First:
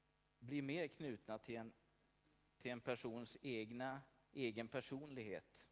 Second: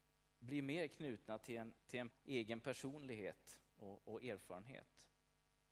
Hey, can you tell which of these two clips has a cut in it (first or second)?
second